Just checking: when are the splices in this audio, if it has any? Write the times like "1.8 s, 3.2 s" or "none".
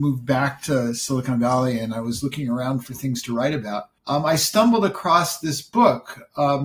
4.0 s